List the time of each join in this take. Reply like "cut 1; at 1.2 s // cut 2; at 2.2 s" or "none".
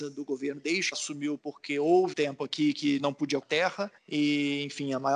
cut 1; at 0.9 s // cut 2; at 1.4 s // cut 3; at 2.1 s // cut 4; at 3.0 s // cut 5; at 3.4 s // cut 6; at 4.0 s